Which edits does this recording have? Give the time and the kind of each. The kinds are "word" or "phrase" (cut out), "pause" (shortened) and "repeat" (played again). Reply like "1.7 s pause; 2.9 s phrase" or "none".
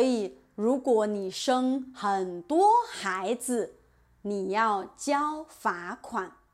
none